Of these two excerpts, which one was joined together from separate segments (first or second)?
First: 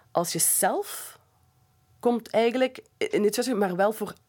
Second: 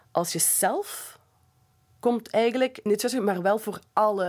second